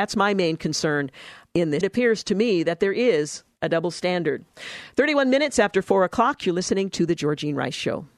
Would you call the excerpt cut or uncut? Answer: cut